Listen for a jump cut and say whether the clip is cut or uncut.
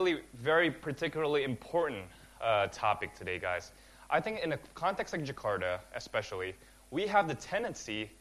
uncut